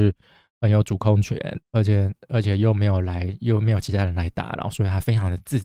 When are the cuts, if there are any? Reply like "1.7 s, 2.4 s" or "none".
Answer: 1.6 s